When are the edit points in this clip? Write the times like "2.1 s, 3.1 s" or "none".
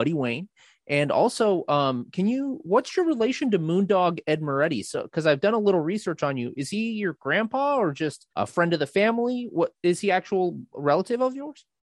8.3 s